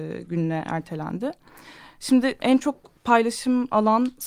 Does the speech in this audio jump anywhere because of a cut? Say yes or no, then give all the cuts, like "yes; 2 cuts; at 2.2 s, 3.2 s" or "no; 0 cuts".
yes; 1 cut; at 2.4 s